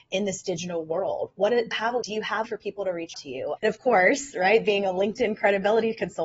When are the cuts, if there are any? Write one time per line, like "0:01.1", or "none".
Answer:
0:01.7
0:02.0
0:02.4
0:03.1
0:03.6